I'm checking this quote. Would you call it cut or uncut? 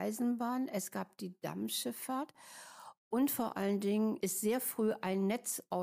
uncut